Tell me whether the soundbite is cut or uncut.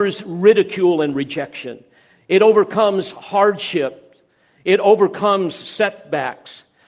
uncut